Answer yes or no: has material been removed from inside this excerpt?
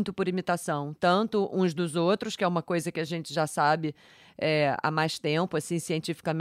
no